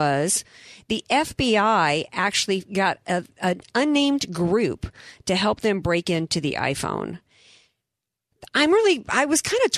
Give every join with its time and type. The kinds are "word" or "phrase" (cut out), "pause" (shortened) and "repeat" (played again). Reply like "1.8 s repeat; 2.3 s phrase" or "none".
none